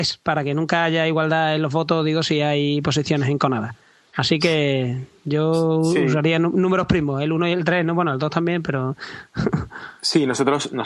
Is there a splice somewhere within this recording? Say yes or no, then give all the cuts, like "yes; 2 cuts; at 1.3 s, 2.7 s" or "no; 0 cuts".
no; 0 cuts